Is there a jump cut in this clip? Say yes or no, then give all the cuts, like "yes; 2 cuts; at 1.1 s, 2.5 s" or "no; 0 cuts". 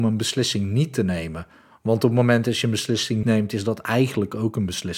yes; 1 cut; at 3.2 s